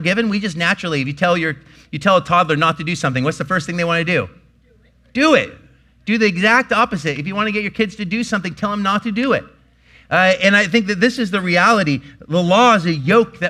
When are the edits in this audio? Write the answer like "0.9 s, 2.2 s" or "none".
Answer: none